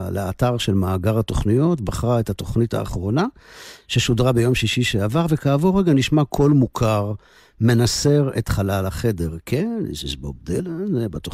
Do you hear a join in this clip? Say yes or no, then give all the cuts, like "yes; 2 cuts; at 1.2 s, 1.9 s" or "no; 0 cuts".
no; 0 cuts